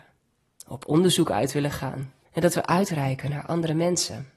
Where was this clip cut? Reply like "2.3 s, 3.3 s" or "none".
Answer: 2.2 s